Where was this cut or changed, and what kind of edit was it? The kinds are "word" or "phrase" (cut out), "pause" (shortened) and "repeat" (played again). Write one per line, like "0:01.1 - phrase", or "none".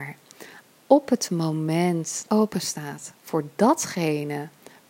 0:02.3 - phrase